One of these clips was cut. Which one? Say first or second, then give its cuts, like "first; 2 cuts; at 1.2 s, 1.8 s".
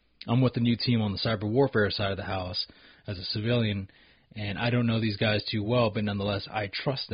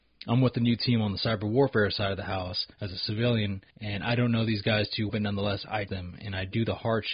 second; 4 cuts; at 2.7 s, 3.7 s, 5.1 s, 5.9 s